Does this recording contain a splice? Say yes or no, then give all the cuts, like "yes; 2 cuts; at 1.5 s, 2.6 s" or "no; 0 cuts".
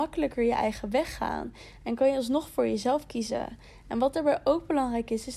no; 0 cuts